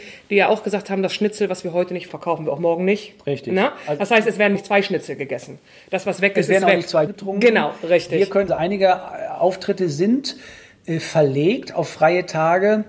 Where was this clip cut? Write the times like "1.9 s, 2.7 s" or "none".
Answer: 2.1 s, 4.5 s, 7.1 s, 8.5 s